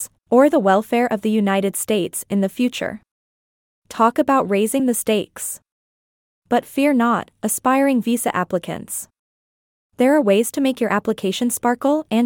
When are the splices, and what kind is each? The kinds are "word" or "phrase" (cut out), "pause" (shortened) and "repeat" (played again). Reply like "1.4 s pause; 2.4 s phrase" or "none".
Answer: none